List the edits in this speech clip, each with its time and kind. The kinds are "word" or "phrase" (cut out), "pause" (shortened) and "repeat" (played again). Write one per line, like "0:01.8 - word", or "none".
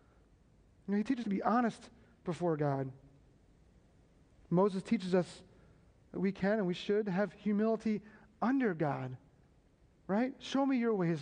0:01.2 - word